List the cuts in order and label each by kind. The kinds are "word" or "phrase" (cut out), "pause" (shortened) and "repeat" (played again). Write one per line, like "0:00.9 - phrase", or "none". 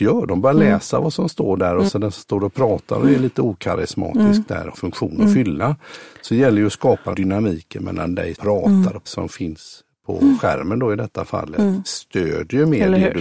0:01.9 - word
0:04.7 - phrase
0:07.1 - word
0:08.3 - word
0:09.1 - phrase